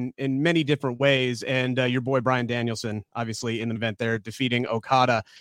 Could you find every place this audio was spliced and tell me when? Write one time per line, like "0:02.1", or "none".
0:03.8